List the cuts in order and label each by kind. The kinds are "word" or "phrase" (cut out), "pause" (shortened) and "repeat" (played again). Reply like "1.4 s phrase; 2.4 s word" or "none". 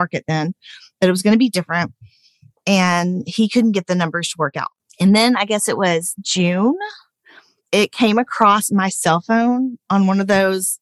none

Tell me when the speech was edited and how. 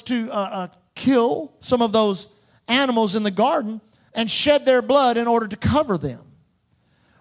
none

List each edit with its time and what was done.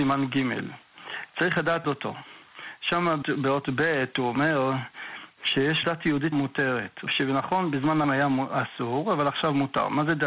1.8 s word; 3.2 s word; 5.8 s word; 6.3 s word; 7.1 s word; 8.0 s word

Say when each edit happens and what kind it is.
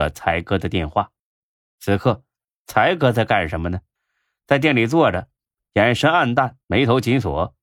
6.6 s pause

